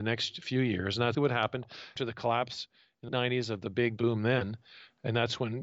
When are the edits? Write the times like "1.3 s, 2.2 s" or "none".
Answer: 1.1 s, 2.0 s, 3.1 s, 4.0 s